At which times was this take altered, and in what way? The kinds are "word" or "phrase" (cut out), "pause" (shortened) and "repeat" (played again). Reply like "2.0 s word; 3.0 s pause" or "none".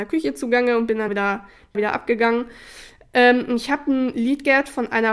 1.1 s word; 1.7 s phrase